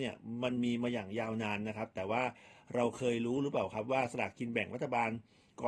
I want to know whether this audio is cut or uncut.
uncut